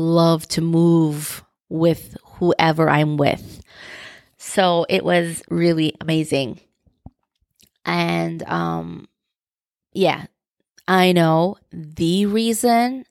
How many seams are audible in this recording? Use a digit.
1